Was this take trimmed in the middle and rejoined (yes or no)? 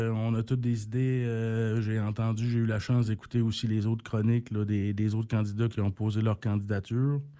yes